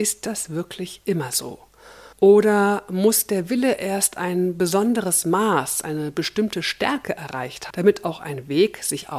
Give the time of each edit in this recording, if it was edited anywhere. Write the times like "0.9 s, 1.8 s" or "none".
2.1 s, 7.7 s